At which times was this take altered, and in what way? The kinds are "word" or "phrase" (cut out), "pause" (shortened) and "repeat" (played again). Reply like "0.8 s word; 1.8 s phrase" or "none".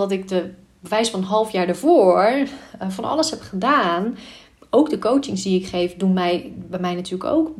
none